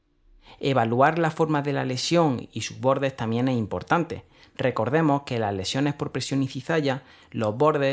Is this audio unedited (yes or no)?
yes